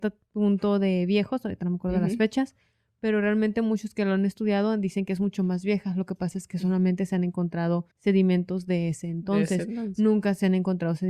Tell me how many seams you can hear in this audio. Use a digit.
1